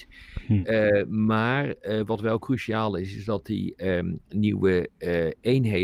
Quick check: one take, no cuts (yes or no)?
yes